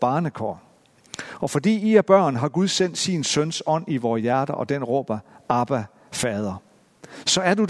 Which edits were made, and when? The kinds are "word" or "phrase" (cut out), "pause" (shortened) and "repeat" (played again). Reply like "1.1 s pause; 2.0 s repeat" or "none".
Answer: none